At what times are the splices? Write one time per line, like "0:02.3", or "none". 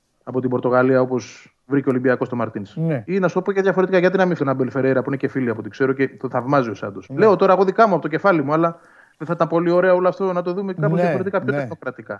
0:04.4
0:07.0
0:10.7

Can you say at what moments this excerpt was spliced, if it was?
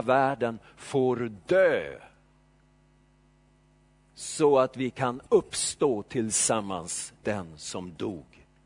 0:07.2

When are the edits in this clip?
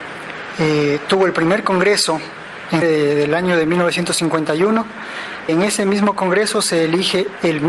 0:02.8
0:05.5

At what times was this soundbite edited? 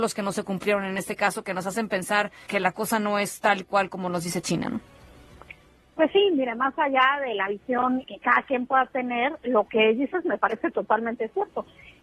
0:02.5
0:08.0

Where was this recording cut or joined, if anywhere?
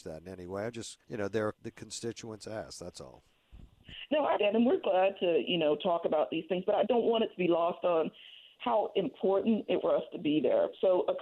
0:01.0
0:01.5
0:04.4
0:06.9
0:09.8

